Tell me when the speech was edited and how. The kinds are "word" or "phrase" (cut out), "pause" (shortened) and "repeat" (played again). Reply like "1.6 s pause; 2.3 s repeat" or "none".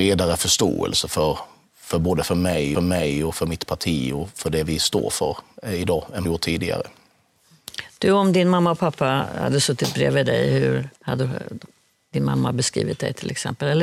2.7 s repeat; 4.3 s word; 6.2 s phrase; 11.0 s pause